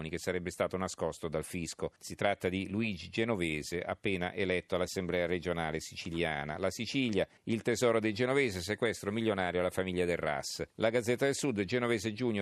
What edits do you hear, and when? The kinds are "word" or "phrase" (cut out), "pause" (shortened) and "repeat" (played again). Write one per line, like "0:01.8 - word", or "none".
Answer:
0:02.0 - pause
0:07.4 - pause
0:10.7 - pause